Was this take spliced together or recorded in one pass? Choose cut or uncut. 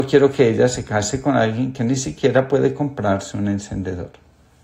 uncut